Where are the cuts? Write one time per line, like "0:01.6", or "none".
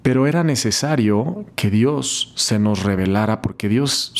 0:01.5